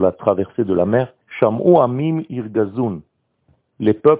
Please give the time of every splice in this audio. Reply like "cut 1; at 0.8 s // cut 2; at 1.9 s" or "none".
cut 1; at 1.2 s